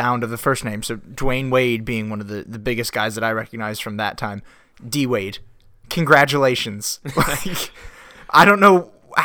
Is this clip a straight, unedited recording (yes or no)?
yes